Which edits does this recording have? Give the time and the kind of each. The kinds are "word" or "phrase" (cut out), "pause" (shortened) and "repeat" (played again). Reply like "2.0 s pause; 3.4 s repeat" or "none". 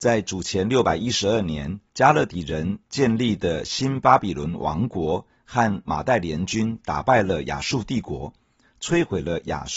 1.9 s pause